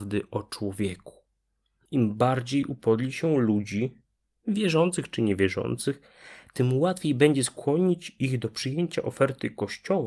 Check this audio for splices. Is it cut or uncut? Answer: uncut